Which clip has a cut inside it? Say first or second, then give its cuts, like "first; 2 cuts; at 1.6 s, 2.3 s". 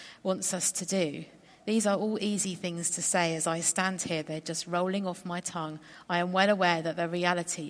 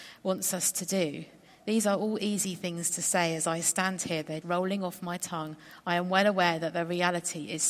second; 1 cut; at 4.4 s